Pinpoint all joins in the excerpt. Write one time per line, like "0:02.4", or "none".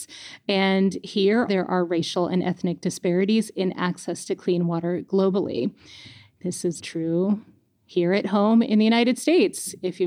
0:01.5
0:06.8